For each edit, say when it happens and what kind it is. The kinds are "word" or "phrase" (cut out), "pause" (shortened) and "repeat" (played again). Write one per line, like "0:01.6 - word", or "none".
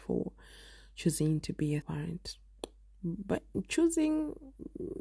0:01.8 - word